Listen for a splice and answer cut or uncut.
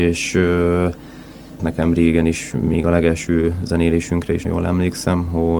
cut